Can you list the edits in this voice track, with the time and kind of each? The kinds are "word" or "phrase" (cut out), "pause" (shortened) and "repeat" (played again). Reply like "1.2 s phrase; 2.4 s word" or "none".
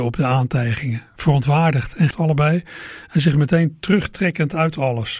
2.1 s word

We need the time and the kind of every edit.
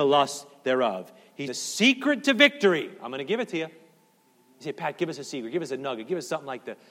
1.5 s word

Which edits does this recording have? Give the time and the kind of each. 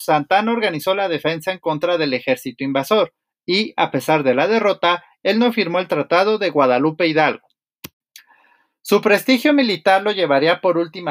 none

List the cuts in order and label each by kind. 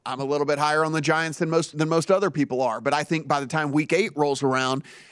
1.7 s word

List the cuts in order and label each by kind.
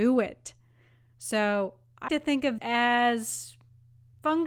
2.1 s word; 2.6 s word

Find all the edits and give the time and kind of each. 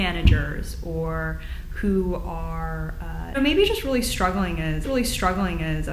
3.3 s word; 4.8 s repeat

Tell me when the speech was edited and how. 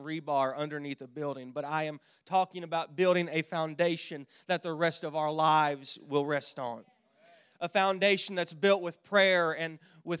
none

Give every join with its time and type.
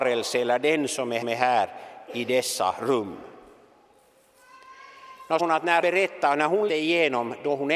1.2 s repeat; 5.4 s phrase; 5.8 s word; 6.7 s word

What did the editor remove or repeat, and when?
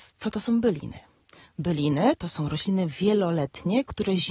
none

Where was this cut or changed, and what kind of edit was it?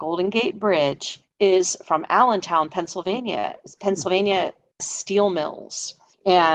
4.8 s word

